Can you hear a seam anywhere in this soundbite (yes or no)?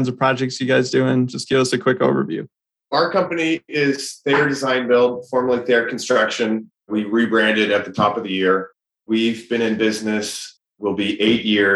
no